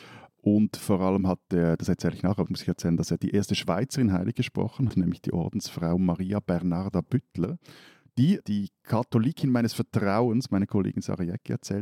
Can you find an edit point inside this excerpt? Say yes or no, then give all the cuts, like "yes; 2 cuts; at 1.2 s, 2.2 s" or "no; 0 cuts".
yes; 3 cuts; at 2.5 s, 4.9 s, 8.4 s